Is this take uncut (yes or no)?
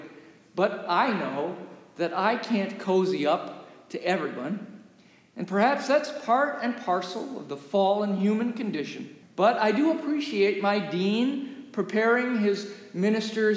no